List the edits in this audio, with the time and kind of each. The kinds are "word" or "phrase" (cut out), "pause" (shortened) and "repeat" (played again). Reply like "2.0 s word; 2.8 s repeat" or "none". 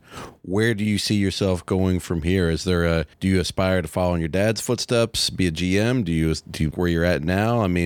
3.1 s pause; 6.7 s word